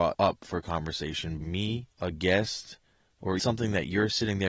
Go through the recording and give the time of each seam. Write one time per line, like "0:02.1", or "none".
0:01.4
0:01.9
0:03.4